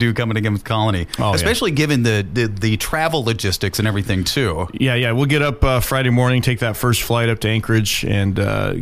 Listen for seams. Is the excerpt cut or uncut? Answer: uncut